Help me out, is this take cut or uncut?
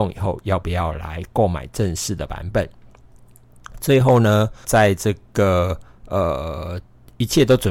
cut